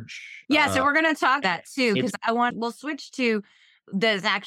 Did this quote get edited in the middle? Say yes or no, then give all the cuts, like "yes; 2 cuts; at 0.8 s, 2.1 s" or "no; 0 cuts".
yes; 2 cuts; at 1.4 s, 2.5 s